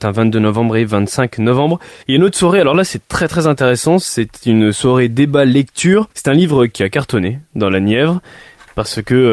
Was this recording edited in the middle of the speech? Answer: yes; 2 cuts; at 2.0 s, 6.1 s

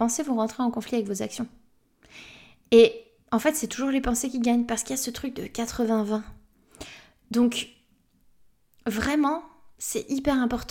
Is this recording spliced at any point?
no; 0 cuts

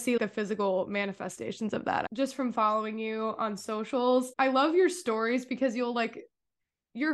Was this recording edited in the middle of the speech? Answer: no; 0 cuts

